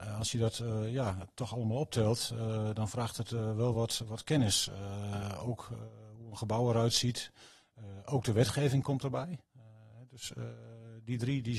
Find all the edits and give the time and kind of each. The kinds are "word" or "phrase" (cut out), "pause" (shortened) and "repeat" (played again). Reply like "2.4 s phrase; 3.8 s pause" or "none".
none